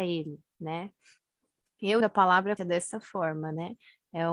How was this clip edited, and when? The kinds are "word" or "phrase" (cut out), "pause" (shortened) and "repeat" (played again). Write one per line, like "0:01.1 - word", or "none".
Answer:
0:02.0 - word
0:02.6 - word